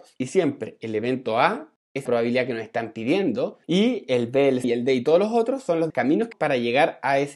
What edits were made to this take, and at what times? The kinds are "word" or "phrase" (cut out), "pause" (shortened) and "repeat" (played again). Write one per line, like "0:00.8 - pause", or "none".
0:02.1 - phrase
0:03.6 - pause
0:04.6 - word
0:05.9 - word
0:06.3 - word